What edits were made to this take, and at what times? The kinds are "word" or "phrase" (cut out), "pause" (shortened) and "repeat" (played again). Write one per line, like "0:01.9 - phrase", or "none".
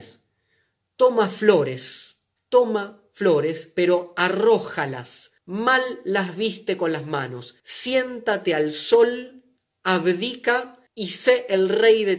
0:02.4 - pause
0:05.4 - pause
0:07.6 - pause
0:10.9 - pause